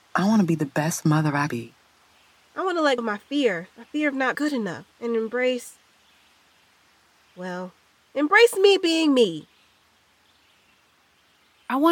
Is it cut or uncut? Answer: cut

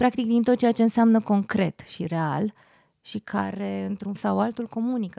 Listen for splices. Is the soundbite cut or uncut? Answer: cut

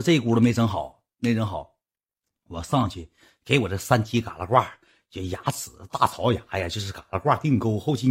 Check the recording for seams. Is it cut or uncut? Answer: uncut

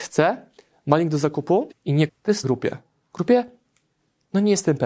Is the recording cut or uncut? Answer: cut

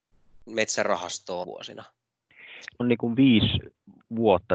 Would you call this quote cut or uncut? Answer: cut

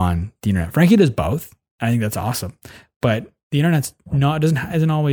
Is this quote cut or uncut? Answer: cut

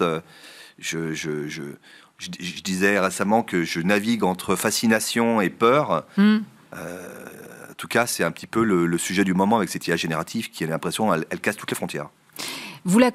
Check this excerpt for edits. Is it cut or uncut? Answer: uncut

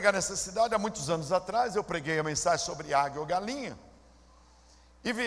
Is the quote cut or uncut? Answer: uncut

